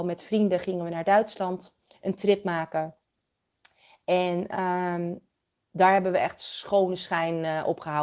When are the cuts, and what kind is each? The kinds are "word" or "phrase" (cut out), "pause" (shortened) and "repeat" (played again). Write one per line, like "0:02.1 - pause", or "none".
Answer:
none